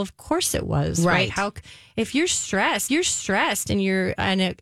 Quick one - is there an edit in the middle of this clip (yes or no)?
yes